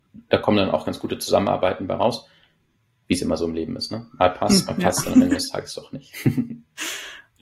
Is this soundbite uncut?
yes; 0 cuts

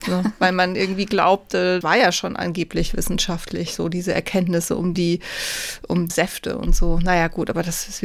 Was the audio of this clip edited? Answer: yes; 3 cuts; at 1.8 s, 4.9 s, 6.1 s

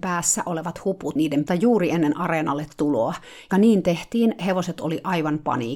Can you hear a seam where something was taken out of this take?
yes; 3 cuts; at 1.2 s, 1.5 s, 3.5 s

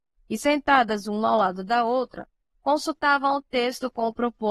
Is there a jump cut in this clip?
no; 0 cuts

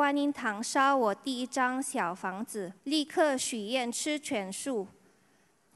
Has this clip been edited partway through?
yes; 1 cut; at 2.8 s

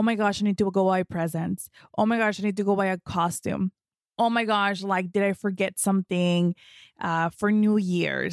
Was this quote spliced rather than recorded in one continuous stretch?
no; 0 cuts

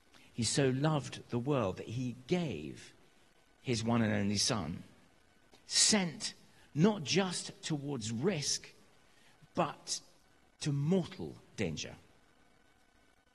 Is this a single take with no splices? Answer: yes; 0 cuts

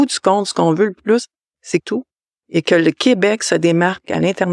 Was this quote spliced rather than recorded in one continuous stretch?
yes; 1 cut; at 1.8 s

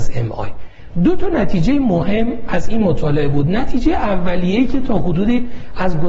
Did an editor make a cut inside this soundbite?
no; 0 cuts

